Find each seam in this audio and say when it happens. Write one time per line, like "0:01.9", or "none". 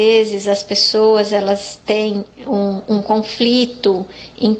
none

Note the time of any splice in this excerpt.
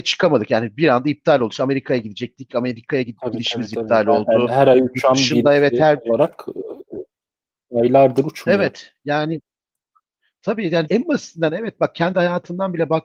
0:10.9

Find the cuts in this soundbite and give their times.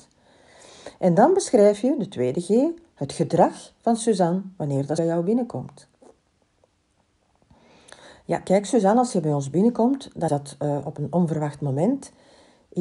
0:05.0
0:10.3

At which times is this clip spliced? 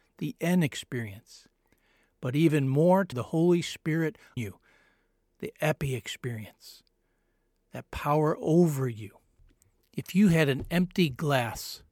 0:03.1
0:04.4

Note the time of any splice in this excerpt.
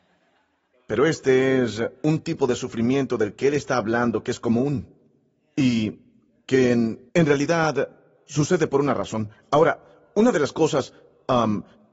0:07.1

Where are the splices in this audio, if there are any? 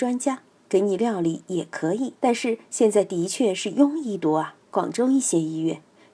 0:02.2
0:04.6

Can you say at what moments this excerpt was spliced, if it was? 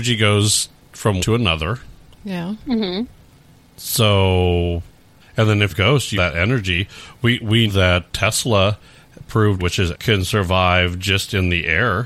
0:01.2
0:05.2
0:05.7
0:06.1
0:07.7
0:08.1
0:09.6
0:09.9

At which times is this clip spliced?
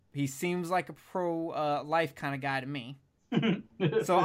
none

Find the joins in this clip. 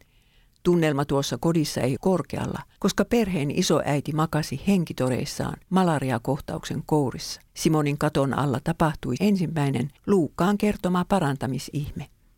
0:02.0
0:02.8
0:05.6
0:07.5
0:09.2
0:10.0

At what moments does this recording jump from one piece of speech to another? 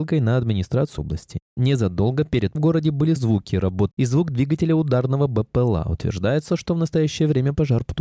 0:01.0
0:02.6
0:03.2
0:03.9

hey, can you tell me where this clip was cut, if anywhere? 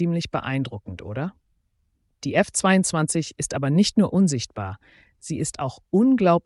none

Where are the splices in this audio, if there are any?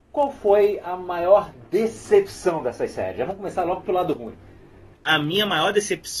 0:04.9

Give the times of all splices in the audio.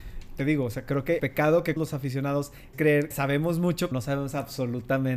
0:01.2
0:01.8
0:02.7
0:03.1
0:03.9

